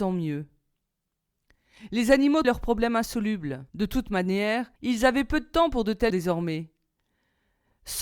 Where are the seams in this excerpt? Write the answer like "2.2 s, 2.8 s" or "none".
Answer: 2.4 s, 3.7 s, 4.8 s, 6.1 s

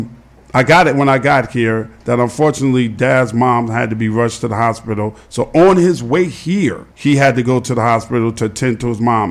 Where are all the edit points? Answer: 6.9 s

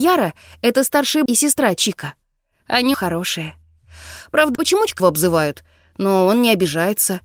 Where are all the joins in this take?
1.3 s, 2.9 s, 4.5 s, 5.0 s

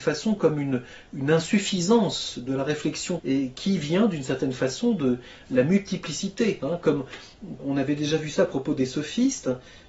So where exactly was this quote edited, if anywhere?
3.2 s, 7.6 s

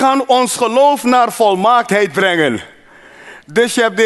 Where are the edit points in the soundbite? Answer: none

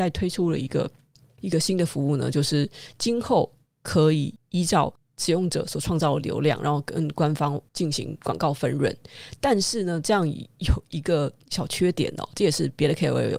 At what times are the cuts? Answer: none

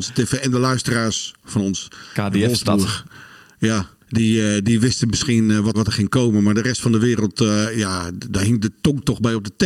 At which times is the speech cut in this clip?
4.0 s, 5.7 s

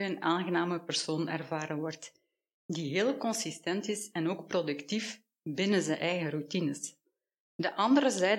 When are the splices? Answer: none

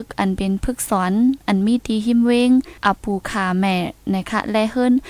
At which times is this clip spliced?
2.8 s

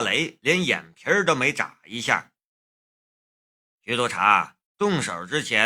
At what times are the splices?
4.7 s

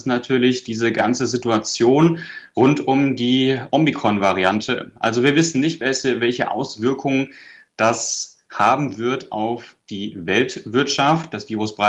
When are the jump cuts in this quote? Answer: none

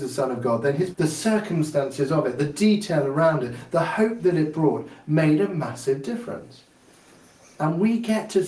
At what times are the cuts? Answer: 0.9 s

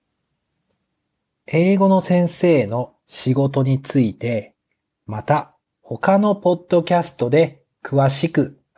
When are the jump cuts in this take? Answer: none

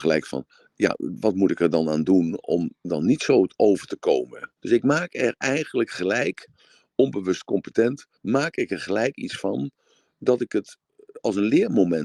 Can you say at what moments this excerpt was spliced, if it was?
4.6 s, 8.2 s

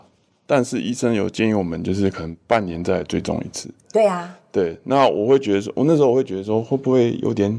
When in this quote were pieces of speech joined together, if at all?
none

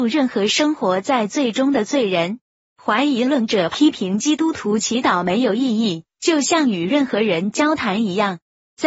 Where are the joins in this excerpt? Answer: none

